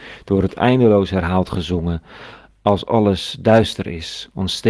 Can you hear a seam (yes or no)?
no